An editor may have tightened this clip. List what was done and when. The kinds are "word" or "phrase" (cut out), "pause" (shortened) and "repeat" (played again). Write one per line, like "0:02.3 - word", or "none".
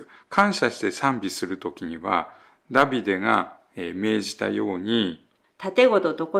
none